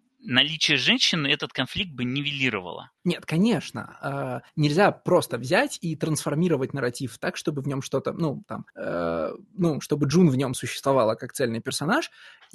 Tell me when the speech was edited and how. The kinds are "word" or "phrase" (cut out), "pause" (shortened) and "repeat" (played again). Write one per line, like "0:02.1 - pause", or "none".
0:03.0 - pause
0:04.5 - pause
0:08.7 - pause